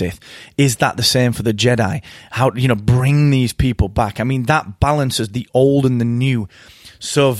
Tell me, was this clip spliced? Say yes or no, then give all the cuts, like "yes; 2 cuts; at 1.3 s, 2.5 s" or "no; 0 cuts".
no; 0 cuts